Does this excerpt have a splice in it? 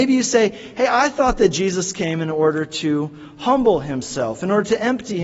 no; 0 cuts

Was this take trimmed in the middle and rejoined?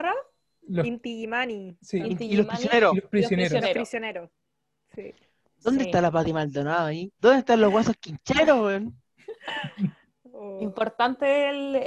no; 0 cuts

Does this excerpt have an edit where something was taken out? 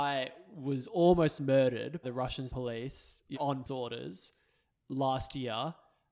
yes; 4 cuts; at 2.0 s, 2.5 s, 3.3 s, 3.6 s

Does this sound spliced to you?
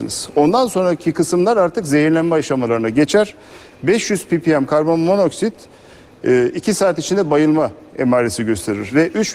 no; 0 cuts

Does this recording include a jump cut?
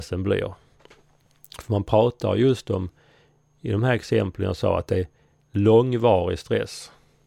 no; 0 cuts

